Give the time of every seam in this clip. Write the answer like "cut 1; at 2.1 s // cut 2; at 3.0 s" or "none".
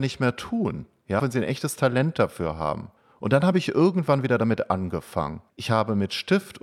cut 1; at 1.2 s // cut 2; at 3.0 s // cut 3; at 5.5 s